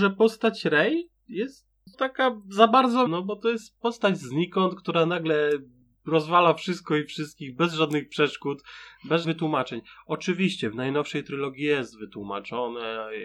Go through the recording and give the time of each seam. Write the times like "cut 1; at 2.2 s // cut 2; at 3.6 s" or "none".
cut 1; at 1.9 s // cut 2; at 3.1 s // cut 3; at 9.2 s